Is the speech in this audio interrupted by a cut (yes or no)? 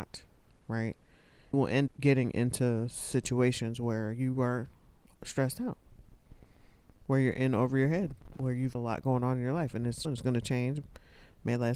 yes